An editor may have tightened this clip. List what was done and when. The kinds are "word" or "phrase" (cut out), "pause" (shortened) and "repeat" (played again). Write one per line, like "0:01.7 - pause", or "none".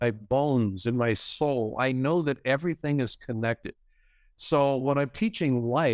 none